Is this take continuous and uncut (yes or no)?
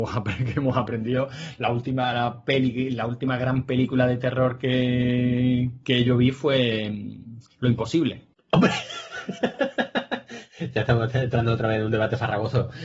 no